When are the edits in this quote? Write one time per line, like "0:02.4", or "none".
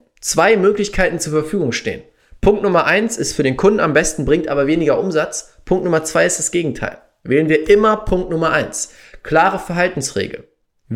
none